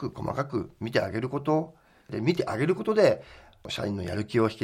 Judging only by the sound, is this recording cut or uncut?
uncut